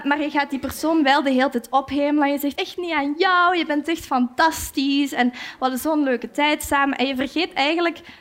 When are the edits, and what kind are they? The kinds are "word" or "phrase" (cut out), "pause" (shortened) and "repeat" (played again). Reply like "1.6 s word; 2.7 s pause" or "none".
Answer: 2.5 s phrase